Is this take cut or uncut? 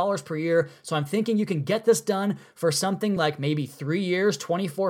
uncut